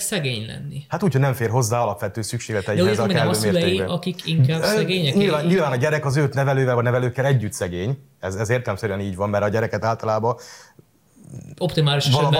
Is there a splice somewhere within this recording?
no; 0 cuts

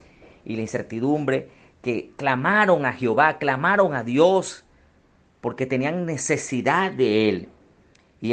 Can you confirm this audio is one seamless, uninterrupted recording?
yes; 0 cuts

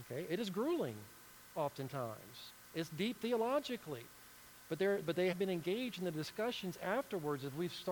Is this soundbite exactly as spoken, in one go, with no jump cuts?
no; 2 cuts; at 5.0 s, 5.3 s

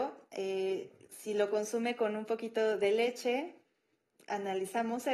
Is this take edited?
no; 0 cuts

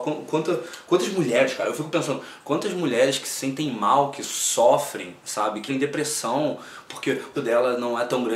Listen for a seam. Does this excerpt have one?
yes; 2 cuts; at 5.7 s, 7.3 s

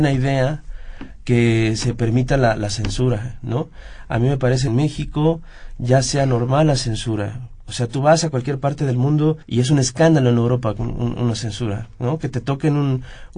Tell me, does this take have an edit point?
yes; 2 cuts; at 4.7 s, 9.4 s

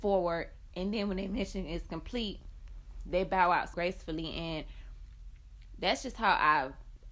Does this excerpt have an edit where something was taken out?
yes; 1 cut; at 3.7 s

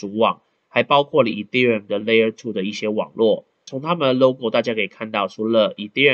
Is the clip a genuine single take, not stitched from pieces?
yes; 0 cuts

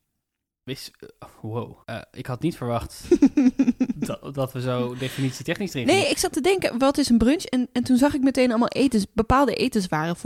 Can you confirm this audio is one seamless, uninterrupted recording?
no; 1 cut; at 1.8 s

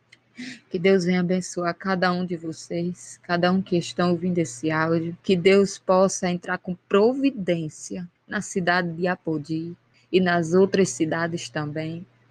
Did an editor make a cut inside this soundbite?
yes; 3 cuts; at 5.2 s, 8.2 s, 9.9 s

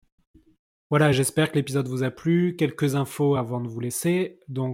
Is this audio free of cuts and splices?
yes; 0 cuts

